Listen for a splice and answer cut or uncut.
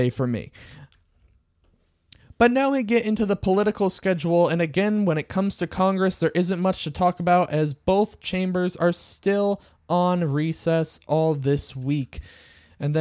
uncut